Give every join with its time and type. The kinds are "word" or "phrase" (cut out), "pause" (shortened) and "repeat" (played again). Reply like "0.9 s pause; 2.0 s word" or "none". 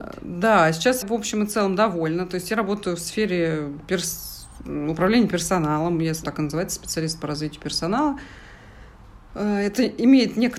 1.0 s word; 6.2 s word